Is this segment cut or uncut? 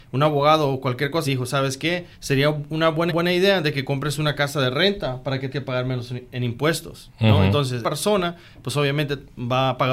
cut